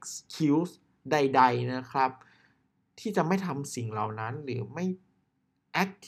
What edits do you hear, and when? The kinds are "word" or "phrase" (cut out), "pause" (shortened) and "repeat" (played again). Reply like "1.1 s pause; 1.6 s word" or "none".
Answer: none